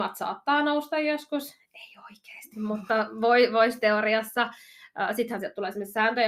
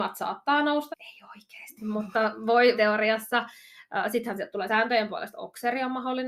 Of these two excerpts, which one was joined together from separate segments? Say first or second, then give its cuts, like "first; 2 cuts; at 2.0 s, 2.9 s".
second; 3 cuts; at 0.9 s, 2.8 s, 4.7 s